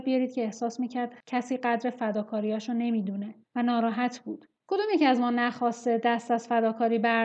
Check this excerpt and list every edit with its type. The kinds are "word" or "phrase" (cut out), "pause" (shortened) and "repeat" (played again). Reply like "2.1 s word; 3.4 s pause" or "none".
3.4 s pause; 4.6 s pause